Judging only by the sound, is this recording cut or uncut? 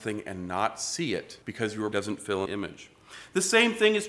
cut